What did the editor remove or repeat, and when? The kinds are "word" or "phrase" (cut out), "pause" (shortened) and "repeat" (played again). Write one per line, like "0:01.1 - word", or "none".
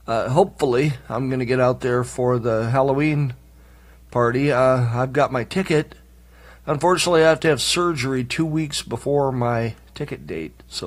none

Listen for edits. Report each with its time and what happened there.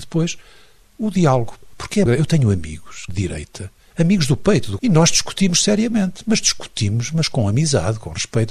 0:02.1 - word
0:03.1 - word
0:04.8 - word

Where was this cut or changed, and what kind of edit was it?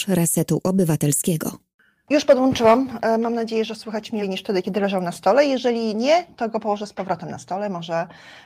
0:04.2 - word

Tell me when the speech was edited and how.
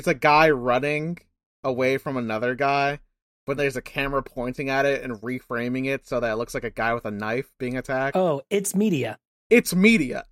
0:03.6 - word

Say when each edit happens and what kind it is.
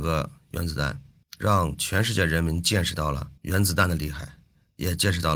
0:01.2 - pause
0:03.4 - pause

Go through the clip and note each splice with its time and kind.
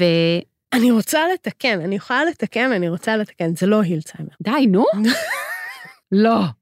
0:04.3 - pause

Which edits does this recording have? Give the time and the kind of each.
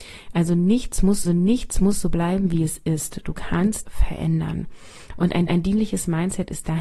0:01.2 - repeat
0:03.8 - word
0:05.5 - repeat

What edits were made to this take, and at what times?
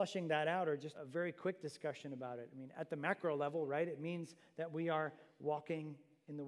0:00.9 - word

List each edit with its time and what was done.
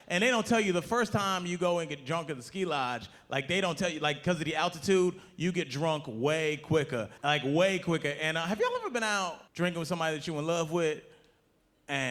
0:07.2 - pause
0:09.5 - pause

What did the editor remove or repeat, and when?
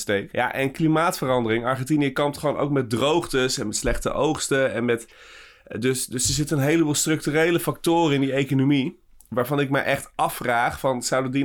none

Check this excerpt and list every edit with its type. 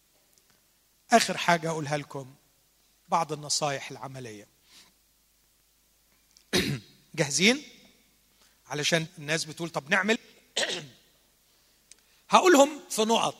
0:09.1 - phrase
0:10.1 - word

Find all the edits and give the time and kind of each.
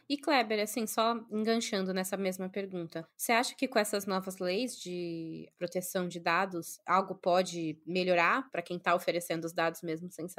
none

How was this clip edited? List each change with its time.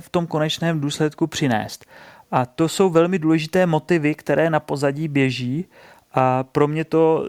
none

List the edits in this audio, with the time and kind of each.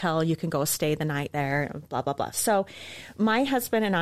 none

